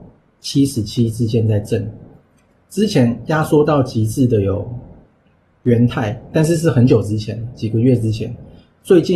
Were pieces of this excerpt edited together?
no; 0 cuts

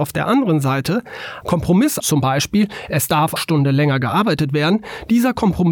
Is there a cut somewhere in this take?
yes; 3 cuts; at 1.4 s, 2.0 s, 3.4 s

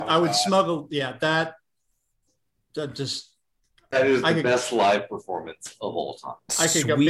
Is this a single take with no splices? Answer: yes; 0 cuts

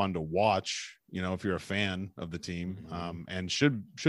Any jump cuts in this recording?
no; 0 cuts

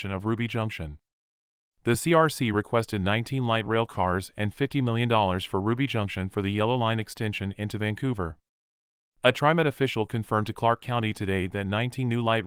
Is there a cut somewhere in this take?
no; 0 cuts

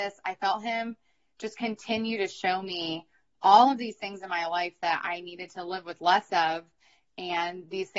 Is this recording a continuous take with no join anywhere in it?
yes; 0 cuts

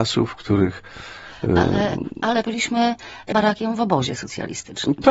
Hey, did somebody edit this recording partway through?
yes; 2 cuts; at 2.4 s, 3.3 s

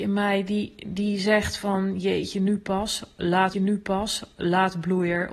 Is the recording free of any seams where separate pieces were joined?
no; 1 cut; at 3.5 s

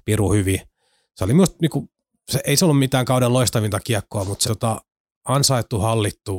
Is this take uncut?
no; 1 cut; at 4.4 s

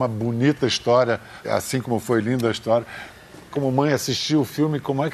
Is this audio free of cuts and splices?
no; 2 cuts; at 1.4 s, 3.5 s

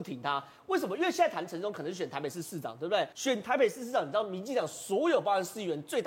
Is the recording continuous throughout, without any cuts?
no; 1 cut; at 3.1 s

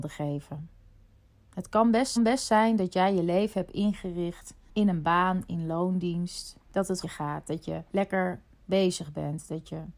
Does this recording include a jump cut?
yes; 3 cuts; at 2.2 s, 7.0 s, 7.9 s

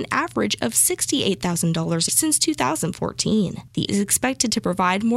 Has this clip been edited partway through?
yes; 2 cuts; at 2.1 s, 3.9 s

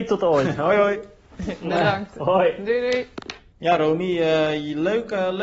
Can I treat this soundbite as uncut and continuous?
yes; 0 cuts

